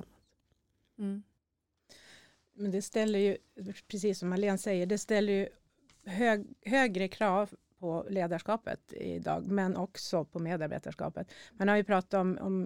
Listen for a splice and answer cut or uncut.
uncut